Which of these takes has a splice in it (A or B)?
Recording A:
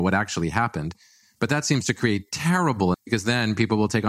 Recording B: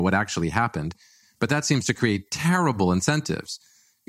A